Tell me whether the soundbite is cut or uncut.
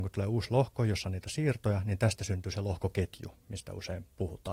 uncut